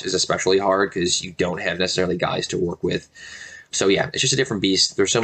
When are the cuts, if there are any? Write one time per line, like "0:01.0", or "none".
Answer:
0:03.7